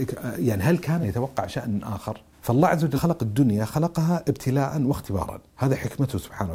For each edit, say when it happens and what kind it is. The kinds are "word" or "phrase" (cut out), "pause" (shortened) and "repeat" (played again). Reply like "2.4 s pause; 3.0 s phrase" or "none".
1.0 s word; 2.3 s pause; 3.0 s word; 5.5 s pause